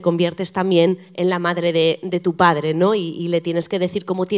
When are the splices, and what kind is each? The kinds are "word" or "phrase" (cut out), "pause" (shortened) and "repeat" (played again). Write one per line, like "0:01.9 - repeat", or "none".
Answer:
none